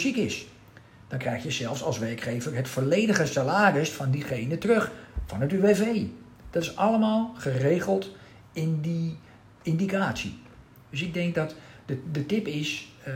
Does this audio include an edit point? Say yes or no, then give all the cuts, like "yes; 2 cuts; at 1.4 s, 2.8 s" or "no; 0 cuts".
no; 0 cuts